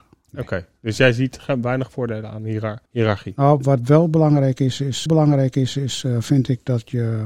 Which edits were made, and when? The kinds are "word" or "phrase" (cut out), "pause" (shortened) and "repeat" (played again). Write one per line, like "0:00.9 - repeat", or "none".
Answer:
0:02.9 - pause
0:05.1 - repeat